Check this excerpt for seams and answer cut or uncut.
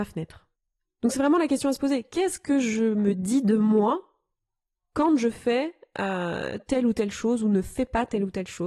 uncut